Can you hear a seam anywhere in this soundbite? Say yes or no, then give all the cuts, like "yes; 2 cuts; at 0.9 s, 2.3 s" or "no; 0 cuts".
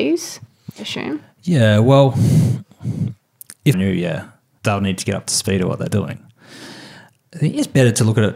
yes; 2 cuts; at 3.7 s, 4.6 s